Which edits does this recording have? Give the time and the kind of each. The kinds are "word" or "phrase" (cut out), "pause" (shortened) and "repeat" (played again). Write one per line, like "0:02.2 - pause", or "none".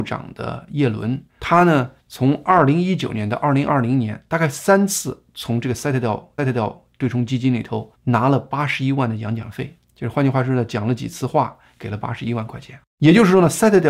0:01.3 - pause
0:02.0 - pause
0:06.4 - repeat
0:07.9 - pause
0:09.8 - pause
0:12.9 - pause